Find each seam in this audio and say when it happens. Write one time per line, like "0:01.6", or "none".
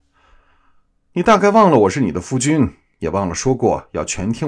none